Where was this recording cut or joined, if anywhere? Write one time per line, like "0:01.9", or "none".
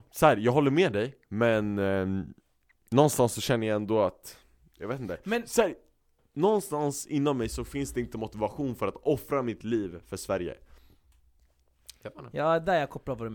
none